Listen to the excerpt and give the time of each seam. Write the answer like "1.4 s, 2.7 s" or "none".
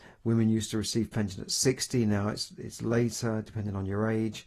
none

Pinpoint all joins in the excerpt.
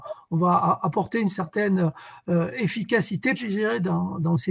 3.4 s

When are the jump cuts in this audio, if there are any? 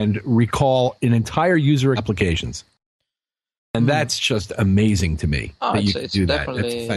2.0 s

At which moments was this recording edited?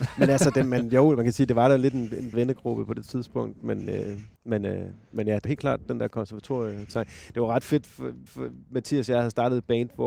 2.3 s, 4.4 s, 5.5 s, 8.3 s

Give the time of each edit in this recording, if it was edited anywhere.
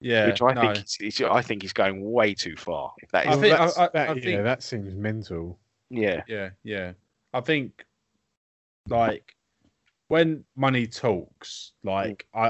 1.0 s

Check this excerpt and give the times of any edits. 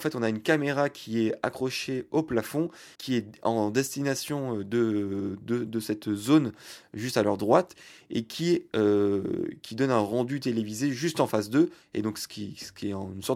2.9 s

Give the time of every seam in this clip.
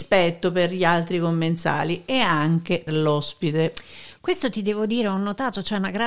2.9 s

